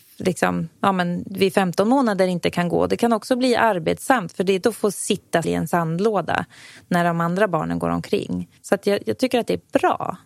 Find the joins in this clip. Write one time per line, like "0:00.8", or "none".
0:04.6
0:05.4
0:08.6

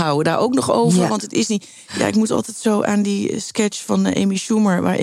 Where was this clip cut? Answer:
none

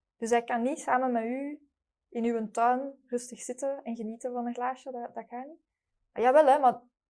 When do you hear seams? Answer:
0:03.0

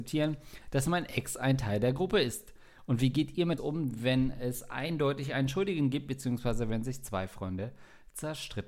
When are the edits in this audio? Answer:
0:03.6

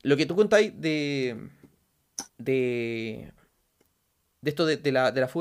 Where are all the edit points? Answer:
0:02.3

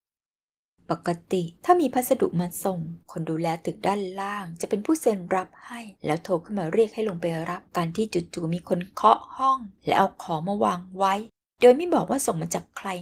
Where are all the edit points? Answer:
0:01.6
0:03.0
0:06.0
0:07.7
0:09.8

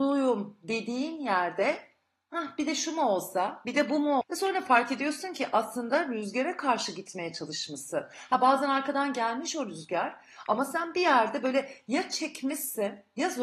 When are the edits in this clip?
0:04.2

